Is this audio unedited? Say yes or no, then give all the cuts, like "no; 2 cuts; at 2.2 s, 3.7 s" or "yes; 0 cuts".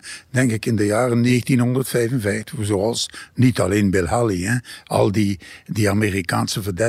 yes; 0 cuts